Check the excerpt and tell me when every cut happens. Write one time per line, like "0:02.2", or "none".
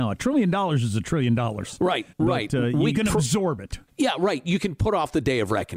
0:02.1
0:02.9
0:03.9